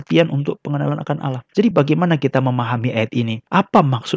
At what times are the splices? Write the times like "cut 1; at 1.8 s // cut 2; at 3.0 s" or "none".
none